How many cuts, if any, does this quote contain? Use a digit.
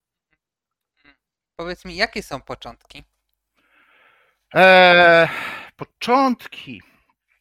0